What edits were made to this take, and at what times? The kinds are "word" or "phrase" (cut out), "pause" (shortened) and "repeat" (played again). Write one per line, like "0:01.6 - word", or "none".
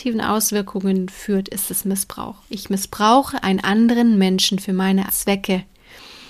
0:05.1 - word